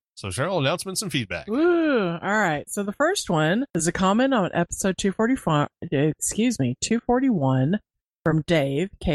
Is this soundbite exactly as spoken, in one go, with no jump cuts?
no; 1 cut; at 3.7 s

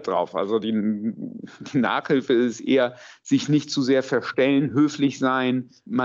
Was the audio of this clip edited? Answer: no; 0 cuts

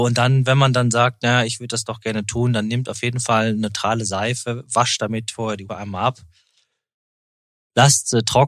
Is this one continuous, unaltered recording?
no; 1 cut; at 5.7 s

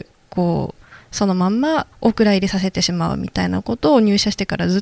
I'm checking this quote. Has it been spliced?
yes; 1 cut; at 1.9 s

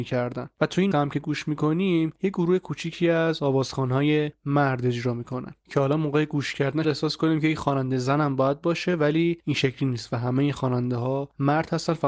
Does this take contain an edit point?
yes; 2 cuts; at 0.9 s, 6.8 s

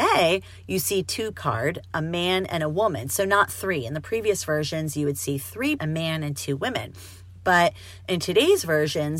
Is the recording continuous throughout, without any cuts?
no; 2 cuts; at 1.3 s, 5.8 s

